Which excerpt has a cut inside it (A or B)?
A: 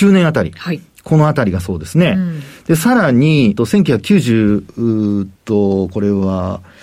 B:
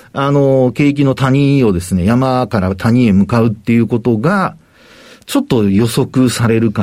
A